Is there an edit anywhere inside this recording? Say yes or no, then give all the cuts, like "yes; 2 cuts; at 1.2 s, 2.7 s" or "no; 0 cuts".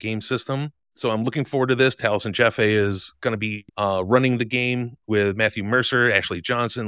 yes; 1 cut; at 3.7 s